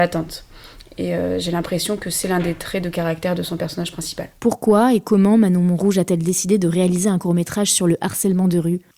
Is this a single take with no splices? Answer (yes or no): yes